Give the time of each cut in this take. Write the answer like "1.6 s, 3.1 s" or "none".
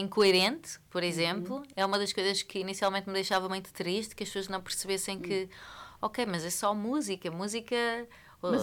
none